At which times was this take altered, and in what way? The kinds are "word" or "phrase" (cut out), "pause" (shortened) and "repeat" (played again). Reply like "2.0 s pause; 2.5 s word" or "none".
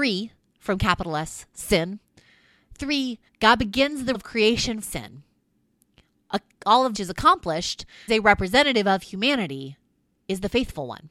3.3 s pause; 4.1 s word; 4.8 s word; 6.9 s word; 8.1 s word